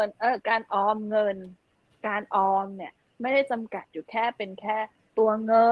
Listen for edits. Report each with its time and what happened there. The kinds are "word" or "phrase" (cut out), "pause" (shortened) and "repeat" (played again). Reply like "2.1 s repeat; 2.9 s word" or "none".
none